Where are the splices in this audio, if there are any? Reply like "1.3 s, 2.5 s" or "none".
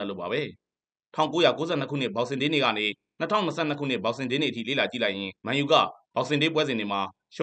5.4 s